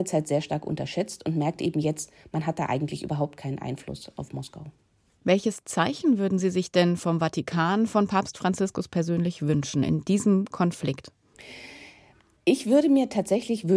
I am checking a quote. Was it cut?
no; 0 cuts

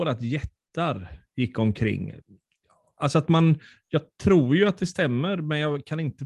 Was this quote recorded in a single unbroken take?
yes; 0 cuts

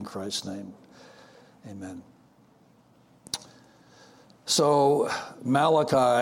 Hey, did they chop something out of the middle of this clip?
no; 0 cuts

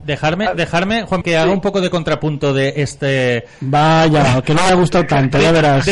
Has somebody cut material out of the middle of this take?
yes; 1 cut; at 1.2 s

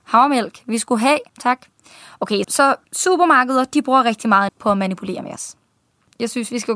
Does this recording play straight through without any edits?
no; 4 cuts; at 1.3 s, 2.4 s, 2.8 s, 4.5 s

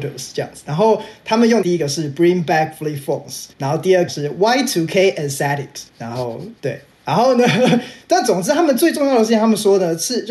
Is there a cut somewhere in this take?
yes; 5 cuts; at 1.6 s, 3.5 s, 4.1 s, 5.9 s, 6.6 s

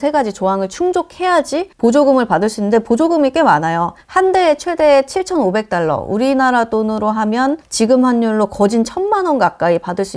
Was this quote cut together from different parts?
yes; 1 cut; at 1.7 s

